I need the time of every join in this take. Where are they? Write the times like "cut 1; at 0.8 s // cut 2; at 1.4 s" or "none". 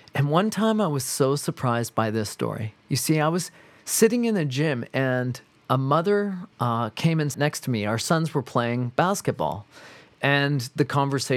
cut 1; at 2.8 s // cut 2; at 6.5 s // cut 3; at 7.3 s